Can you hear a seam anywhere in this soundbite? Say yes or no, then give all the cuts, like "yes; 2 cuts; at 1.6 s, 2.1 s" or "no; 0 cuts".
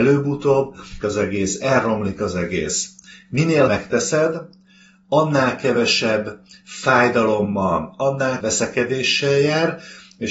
yes; 3 cuts; at 1.0 s, 3.7 s, 8.4 s